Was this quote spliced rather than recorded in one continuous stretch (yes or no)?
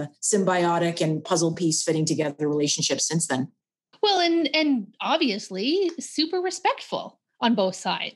no